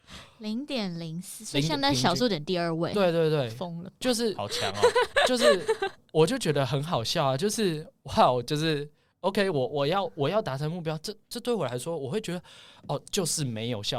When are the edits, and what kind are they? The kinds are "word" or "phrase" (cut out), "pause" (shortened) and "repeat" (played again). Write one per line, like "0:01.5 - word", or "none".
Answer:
none